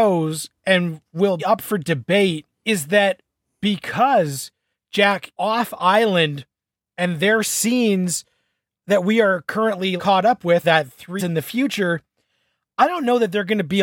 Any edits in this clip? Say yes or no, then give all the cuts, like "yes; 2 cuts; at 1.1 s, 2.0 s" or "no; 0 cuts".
yes; 6 cuts; at 1.4 s, 2.5 s, 5.4 s, 10.0 s, 10.6 s, 11.2 s